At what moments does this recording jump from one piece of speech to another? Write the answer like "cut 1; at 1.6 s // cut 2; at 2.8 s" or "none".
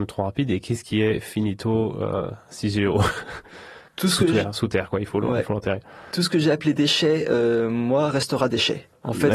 cut 1; at 3.9 s